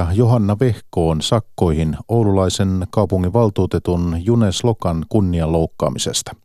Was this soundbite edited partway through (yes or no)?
no